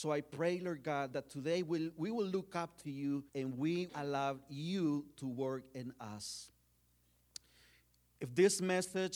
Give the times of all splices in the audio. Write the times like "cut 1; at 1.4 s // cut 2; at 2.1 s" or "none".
cut 1; at 3.3 s // cut 2; at 3.9 s